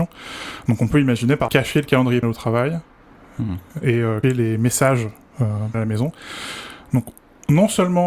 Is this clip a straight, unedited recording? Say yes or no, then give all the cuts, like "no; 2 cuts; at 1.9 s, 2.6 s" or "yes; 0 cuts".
no; 4 cuts; at 1.5 s, 2.2 s, 4.2 s, 5.7 s